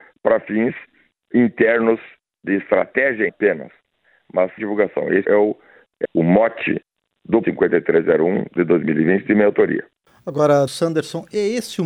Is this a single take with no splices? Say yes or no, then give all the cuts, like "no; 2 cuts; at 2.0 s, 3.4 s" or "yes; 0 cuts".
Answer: no; 7 cuts; at 1.3 s, 3.3 s, 4.6 s, 5.2 s, 6.0 s, 7.4 s, 10.7 s